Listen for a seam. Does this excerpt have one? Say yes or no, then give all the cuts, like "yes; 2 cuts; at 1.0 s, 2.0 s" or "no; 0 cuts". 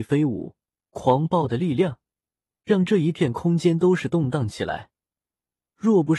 no; 0 cuts